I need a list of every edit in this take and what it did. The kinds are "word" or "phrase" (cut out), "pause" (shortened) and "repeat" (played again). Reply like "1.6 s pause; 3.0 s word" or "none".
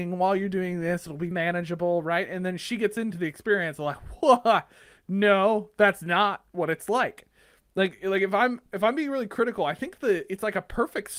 1.3 s word